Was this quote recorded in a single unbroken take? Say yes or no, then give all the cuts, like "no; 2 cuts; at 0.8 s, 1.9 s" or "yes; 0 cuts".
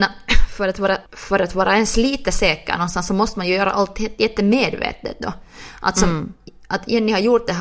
no; 1 cut; at 1.1 s